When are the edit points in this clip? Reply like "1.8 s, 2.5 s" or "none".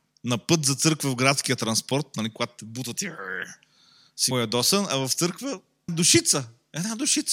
4.3 s, 5.9 s